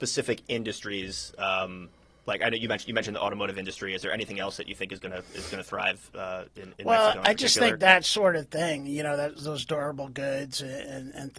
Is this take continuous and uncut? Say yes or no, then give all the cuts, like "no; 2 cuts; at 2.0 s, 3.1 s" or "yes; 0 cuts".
yes; 0 cuts